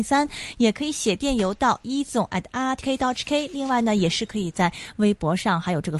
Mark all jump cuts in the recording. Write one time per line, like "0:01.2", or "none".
0:02.8